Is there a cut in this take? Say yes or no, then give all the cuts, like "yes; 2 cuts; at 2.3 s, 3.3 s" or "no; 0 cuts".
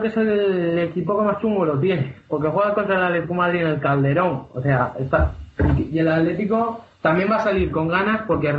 no; 0 cuts